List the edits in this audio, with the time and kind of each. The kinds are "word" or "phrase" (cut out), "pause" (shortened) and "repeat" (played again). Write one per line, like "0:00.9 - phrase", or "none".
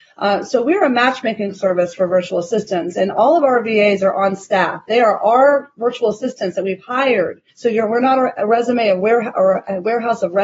0:07.5 - pause